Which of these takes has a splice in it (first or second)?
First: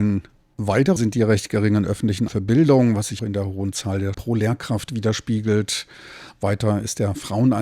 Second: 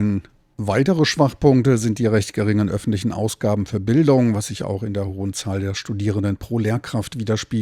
first